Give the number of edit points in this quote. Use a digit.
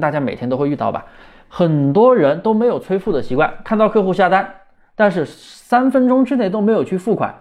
0